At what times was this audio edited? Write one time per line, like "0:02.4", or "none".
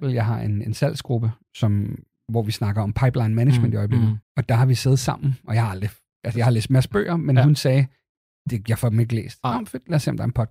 0:04.2